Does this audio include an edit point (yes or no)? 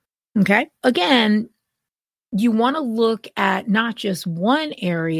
no